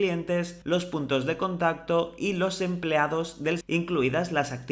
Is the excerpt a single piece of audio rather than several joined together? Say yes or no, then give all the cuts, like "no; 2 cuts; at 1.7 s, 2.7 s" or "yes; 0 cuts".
no; 1 cut; at 3.6 s